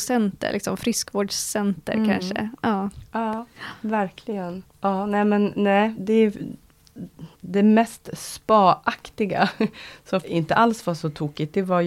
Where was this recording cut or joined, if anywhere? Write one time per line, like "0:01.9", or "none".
0:04.7
0:06.0
0:07.3
0:10.2

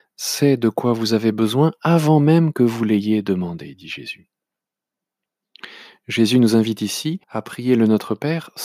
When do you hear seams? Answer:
0:07.2

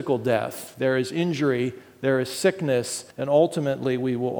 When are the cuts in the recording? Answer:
0:03.1

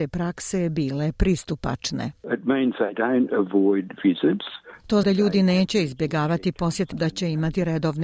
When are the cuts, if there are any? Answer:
0:05.0
0:06.9

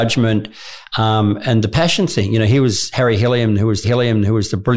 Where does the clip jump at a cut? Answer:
0:03.8

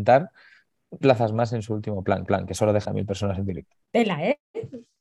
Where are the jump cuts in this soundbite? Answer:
0:01.0
0:02.3
0:02.8
0:03.8

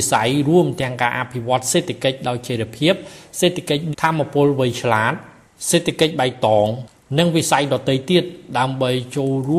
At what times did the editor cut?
0:03.9

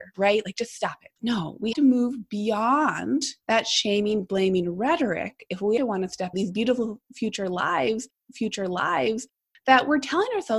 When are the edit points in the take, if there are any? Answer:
0:01.2
0:01.7
0:03.4
0:05.8
0:06.3
0:08.3

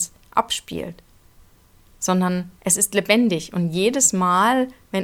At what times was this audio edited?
0:02.5

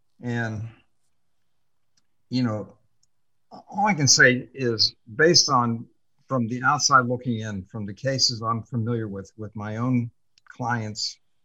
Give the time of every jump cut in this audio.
none

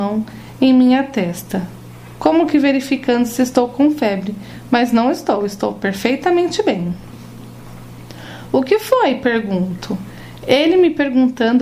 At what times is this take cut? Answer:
none

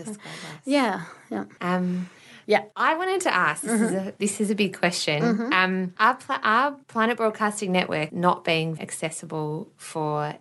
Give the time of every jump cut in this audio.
0:02.4
0:06.8
0:08.1
0:08.8

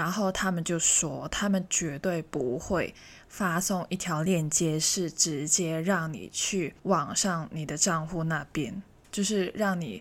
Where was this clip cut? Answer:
0:06.8

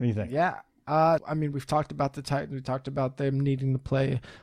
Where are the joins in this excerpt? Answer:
0:01.2

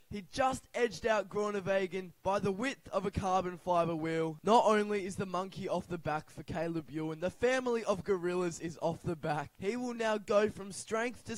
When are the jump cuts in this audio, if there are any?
none

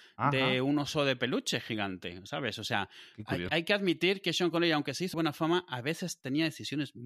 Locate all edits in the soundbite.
0:03.5
0:05.1

